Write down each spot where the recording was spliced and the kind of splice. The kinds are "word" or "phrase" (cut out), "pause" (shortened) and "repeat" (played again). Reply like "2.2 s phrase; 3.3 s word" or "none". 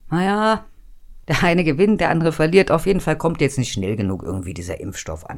1.2 s pause